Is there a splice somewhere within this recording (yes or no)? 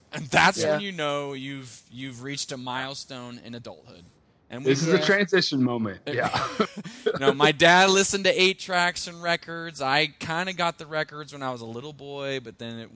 no